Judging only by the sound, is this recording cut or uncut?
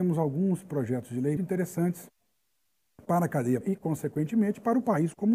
cut